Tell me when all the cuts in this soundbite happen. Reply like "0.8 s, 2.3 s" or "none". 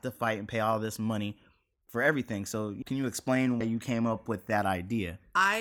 1.9 s, 2.8 s, 3.6 s